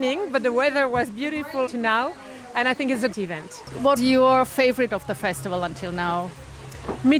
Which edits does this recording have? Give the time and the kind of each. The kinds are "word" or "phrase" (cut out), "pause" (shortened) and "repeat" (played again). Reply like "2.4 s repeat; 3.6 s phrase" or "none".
1.7 s word; 3.1 s word; 4.0 s word; 4.9 s word